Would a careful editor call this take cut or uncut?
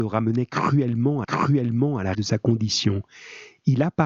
cut